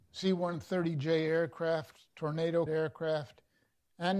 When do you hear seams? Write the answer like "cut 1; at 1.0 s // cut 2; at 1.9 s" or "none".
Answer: cut 1; at 2.7 s